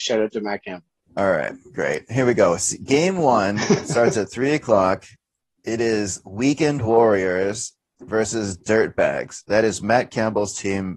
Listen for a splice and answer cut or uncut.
uncut